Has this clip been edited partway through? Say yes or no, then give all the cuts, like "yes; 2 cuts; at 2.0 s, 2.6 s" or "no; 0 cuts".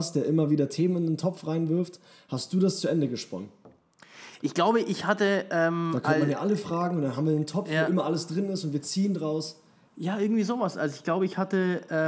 no; 0 cuts